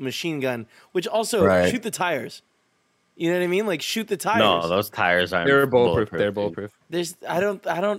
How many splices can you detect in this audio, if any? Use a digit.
0